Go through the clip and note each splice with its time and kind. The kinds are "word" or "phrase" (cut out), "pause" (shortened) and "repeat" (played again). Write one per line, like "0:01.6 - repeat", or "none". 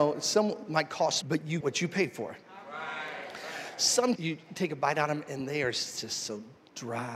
0:01.2 - word
0:01.6 - word
0:04.2 - word